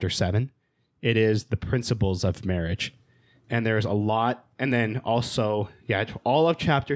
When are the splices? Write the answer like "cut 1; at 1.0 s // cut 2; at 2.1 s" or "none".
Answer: none